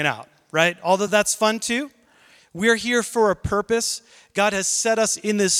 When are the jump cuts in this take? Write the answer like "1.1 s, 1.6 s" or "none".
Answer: none